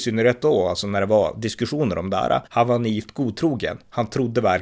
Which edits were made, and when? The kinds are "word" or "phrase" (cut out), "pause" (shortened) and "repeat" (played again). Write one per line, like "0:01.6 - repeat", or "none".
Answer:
0:02.5 - pause